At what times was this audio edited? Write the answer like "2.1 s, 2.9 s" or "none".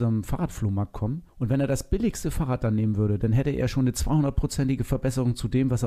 1.3 s